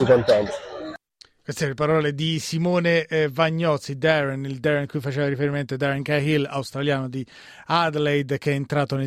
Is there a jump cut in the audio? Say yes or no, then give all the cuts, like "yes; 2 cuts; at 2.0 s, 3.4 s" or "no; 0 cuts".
no; 0 cuts